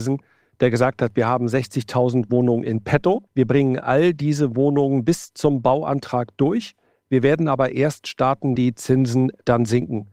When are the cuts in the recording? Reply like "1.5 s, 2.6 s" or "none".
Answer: 3.3 s, 8.6 s